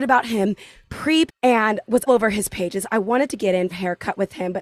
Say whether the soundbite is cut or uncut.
cut